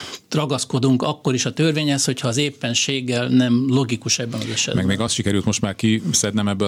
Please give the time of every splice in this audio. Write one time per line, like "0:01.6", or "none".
none